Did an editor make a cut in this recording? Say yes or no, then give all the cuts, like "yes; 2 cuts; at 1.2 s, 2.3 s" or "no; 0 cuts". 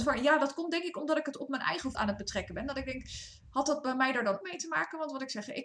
yes; 2 cuts; at 1.9 s, 4.4 s